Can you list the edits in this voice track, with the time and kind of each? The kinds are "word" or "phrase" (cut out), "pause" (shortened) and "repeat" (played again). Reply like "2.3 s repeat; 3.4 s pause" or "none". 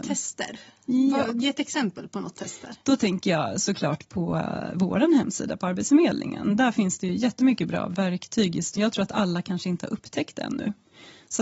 8.8 s phrase